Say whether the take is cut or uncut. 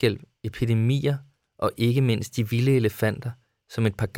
uncut